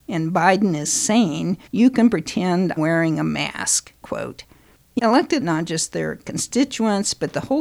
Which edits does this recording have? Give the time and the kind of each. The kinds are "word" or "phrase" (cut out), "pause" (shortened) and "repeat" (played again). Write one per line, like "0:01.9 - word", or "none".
0:01.7 - pause
0:02.8 - word
0:04.0 - word
0:05.0 - word
0:05.4 - phrase